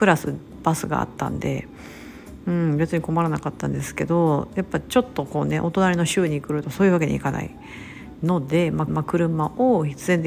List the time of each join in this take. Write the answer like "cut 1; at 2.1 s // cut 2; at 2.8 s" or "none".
cut 1; at 8.9 s